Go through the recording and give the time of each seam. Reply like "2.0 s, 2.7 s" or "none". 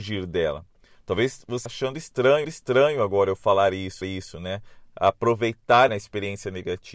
1.7 s, 2.4 s, 4.0 s, 5.9 s